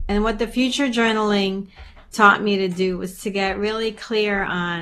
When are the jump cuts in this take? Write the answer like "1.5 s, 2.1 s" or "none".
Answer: none

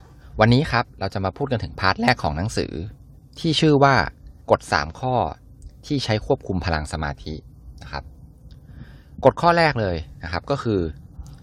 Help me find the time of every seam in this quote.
4.4 s

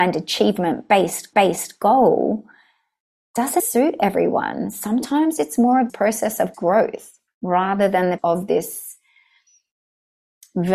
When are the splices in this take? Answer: 1.3 s, 3.6 s, 5.9 s, 6.5 s, 7.3 s, 8.2 s

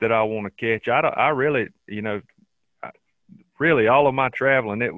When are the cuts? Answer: none

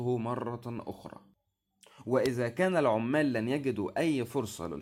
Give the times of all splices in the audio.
none

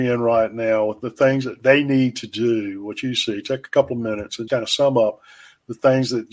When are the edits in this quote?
4.5 s

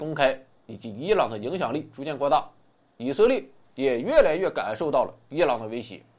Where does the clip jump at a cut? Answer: none

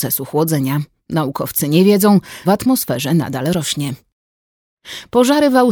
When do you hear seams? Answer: 2.4 s

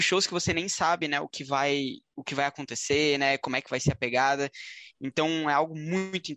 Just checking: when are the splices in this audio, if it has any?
none

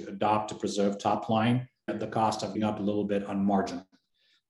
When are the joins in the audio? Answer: 1.9 s, 2.5 s

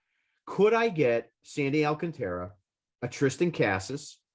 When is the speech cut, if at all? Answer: 1.3 s, 2.8 s

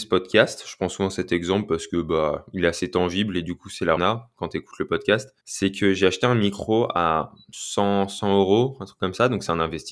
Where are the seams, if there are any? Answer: 4.0 s, 5.4 s

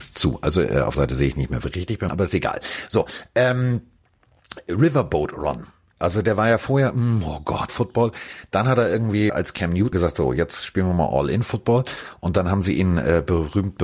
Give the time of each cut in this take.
0.9 s, 2.1 s, 7.7 s, 9.3 s, 9.9 s

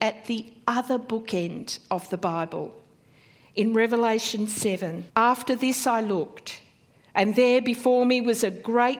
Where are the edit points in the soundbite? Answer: 5.1 s

